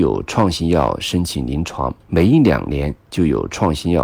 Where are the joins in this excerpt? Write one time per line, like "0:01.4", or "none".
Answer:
0:02.0